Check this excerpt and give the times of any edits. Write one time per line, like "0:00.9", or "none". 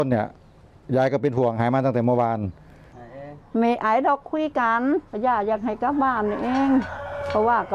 0:05.1